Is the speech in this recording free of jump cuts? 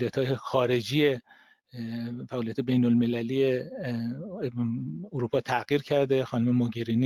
yes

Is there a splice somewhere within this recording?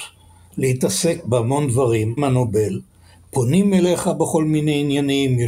yes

